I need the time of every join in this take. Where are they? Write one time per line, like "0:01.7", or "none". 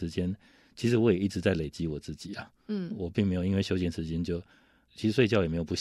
none